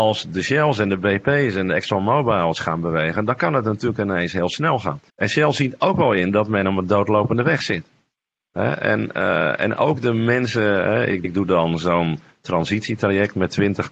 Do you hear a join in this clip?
yes; 1 cut; at 5.1 s

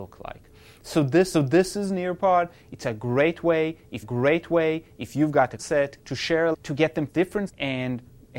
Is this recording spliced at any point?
yes; 7 cuts; at 1.3 s, 4.0 s, 5.6 s, 6.0 s, 6.5 s, 7.1 s, 7.5 s

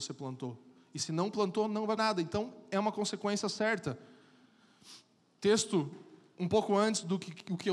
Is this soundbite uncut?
no; 2 cuts; at 2.0 s, 5.2 s

